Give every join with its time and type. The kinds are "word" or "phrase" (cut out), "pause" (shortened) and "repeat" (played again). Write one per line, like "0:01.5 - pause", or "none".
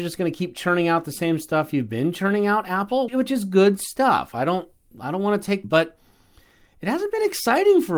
0:03.1 - word
0:05.6 - phrase